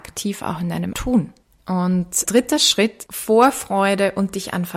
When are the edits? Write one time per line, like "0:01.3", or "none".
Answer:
0:00.9
0:02.3
0:03.1